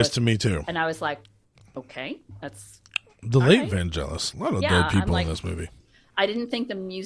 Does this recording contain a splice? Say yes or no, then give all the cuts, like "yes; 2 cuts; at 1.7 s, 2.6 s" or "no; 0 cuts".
no; 0 cuts